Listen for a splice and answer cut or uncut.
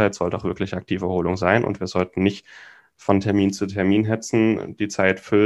uncut